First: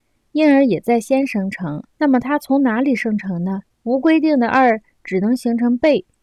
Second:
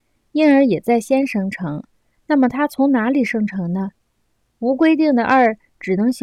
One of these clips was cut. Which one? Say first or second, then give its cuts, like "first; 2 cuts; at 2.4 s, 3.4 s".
first; 2 cuts; at 1.9 s, 3.7 s